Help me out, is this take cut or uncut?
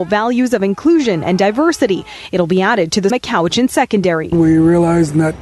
cut